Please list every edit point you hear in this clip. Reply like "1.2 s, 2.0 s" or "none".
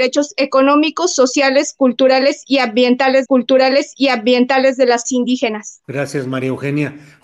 3.3 s, 5.0 s, 5.8 s